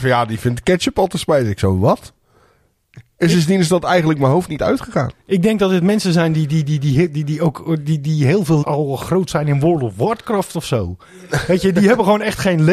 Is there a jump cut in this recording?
yes; 1 cut; at 8.6 s

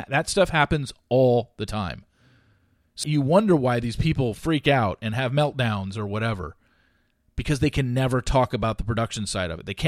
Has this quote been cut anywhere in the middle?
yes; 1 cut; at 3.0 s

